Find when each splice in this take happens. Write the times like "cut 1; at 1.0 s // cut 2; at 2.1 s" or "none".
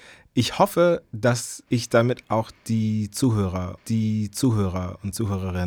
cut 1; at 1.7 s // cut 2; at 3.8 s